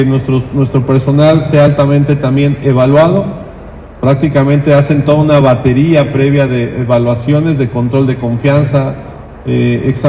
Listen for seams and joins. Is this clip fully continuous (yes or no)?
yes